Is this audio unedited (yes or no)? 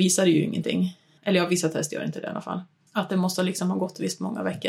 yes